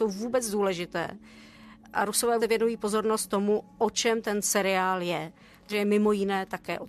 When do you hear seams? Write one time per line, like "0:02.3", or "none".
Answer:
0:02.4
0:05.7